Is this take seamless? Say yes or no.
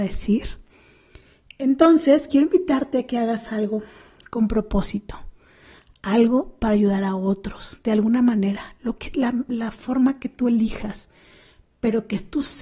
yes